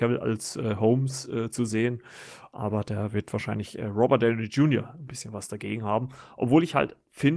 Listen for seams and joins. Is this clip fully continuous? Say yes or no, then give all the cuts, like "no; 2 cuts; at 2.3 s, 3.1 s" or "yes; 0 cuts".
yes; 0 cuts